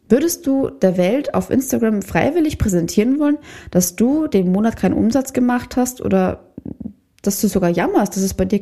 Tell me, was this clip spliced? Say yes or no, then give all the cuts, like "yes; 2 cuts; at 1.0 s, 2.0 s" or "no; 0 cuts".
no; 0 cuts